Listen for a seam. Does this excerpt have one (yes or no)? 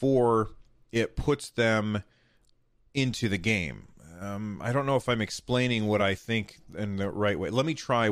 no